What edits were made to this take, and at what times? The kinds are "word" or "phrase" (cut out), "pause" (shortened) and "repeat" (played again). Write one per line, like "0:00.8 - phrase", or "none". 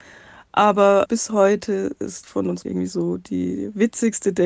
0:01.1 - word
0:02.2 - word
0:02.6 - word